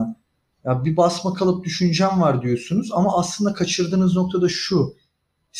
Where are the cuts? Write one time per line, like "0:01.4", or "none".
none